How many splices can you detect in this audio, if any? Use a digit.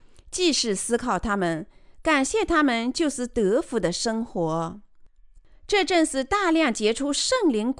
0